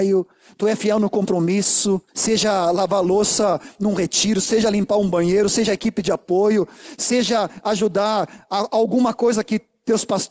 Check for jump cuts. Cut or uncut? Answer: cut